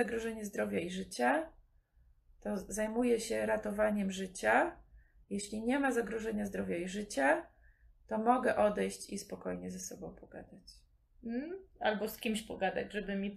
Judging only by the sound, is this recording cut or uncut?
uncut